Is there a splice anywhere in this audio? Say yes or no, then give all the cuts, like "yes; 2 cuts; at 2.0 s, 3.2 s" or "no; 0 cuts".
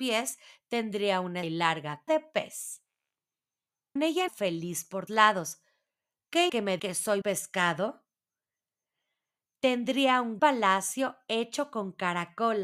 yes; 9 cuts; at 1.4 s, 2.1 s, 4.0 s, 4.3 s, 5.1 s, 6.5 s, 6.8 s, 7.2 s, 10.4 s